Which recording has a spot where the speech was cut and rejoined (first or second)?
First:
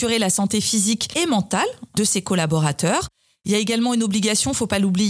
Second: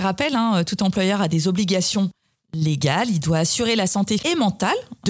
second